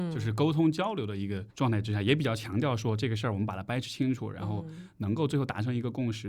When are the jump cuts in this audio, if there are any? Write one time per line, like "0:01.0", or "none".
0:01.5